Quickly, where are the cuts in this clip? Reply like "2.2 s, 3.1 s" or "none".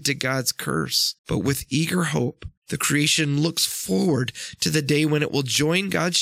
1.2 s, 2.6 s